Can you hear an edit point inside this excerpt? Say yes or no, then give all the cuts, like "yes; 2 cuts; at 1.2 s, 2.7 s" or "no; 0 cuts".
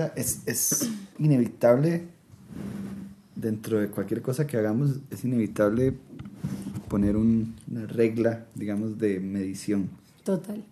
yes; 2 cuts; at 1.1 s, 7.6 s